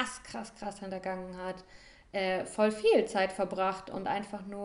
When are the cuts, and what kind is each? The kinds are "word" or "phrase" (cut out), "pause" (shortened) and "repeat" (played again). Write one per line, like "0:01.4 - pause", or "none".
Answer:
none